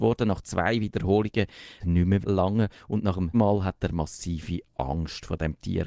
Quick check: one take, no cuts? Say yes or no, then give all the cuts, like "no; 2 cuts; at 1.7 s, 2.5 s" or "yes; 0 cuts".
no; 3 cuts; at 1.8 s, 2.2 s, 3.3 s